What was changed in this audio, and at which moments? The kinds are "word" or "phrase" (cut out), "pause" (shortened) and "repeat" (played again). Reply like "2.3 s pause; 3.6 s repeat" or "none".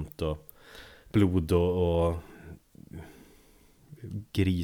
none